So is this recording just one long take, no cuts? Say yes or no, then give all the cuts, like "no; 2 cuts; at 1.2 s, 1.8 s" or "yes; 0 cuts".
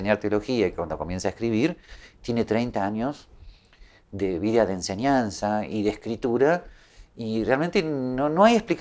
yes; 0 cuts